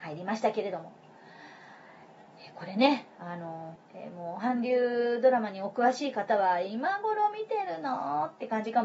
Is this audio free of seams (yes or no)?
no